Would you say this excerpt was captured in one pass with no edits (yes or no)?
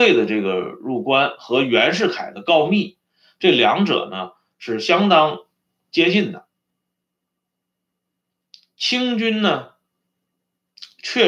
yes